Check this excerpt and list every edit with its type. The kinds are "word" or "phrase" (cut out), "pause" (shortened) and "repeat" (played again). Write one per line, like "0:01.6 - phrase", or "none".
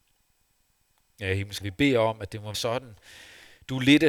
0:01.6 - word
0:02.5 - word